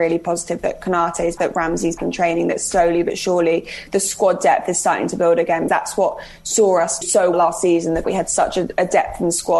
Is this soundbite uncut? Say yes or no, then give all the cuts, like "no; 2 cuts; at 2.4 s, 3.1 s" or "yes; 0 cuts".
no; 6 cuts; at 1.4 s, 2.0 s, 5.7 s, 7.0 s, 7.3 s, 8.0 s